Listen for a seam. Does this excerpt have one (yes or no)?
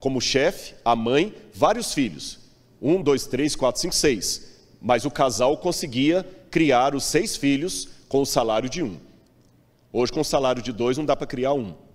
no